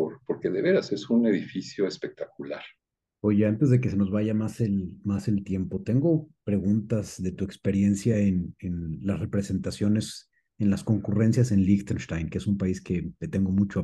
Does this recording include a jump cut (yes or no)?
no